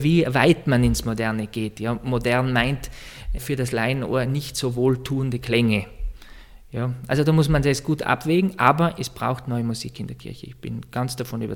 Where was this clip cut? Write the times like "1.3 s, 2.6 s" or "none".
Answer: none